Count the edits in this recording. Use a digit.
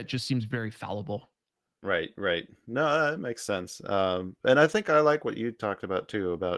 0